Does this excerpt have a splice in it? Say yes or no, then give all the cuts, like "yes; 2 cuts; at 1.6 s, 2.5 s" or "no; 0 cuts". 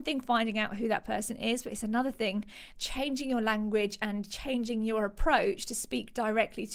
yes; 1 cut; at 2.8 s